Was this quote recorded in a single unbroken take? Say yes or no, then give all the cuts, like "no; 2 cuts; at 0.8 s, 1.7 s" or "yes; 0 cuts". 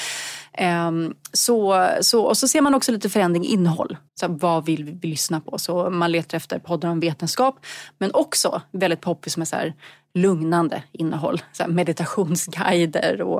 no; 1 cut; at 4.1 s